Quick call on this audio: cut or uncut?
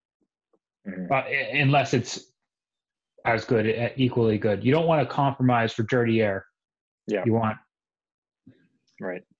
uncut